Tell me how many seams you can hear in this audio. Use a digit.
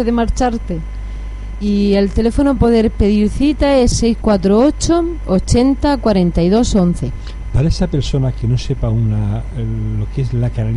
2